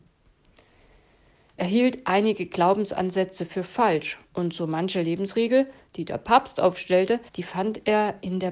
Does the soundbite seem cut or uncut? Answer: cut